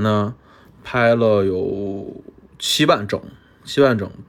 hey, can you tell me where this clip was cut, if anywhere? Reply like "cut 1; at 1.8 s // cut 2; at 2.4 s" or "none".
none